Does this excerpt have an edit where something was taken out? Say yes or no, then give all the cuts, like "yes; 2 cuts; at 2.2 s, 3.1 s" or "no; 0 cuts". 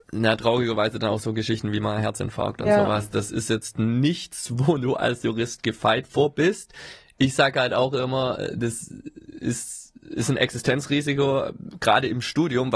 no; 0 cuts